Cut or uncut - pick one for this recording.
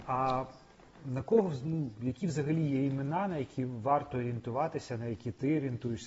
uncut